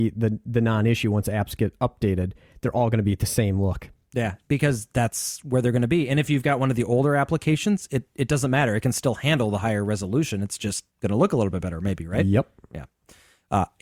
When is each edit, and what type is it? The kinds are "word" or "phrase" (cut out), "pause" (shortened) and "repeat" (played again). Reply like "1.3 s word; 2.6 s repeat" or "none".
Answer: 10.9 s pause